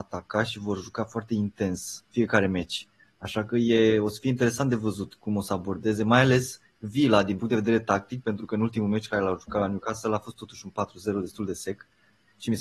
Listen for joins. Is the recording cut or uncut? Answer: uncut